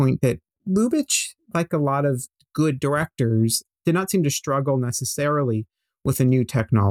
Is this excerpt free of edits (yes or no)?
yes